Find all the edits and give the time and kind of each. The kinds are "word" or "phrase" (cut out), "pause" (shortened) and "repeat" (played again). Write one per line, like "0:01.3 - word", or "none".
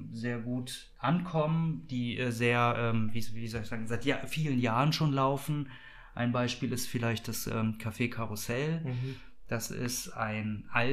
0:00.9 - pause